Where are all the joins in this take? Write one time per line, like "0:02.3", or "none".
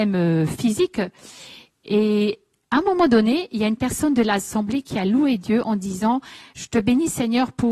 none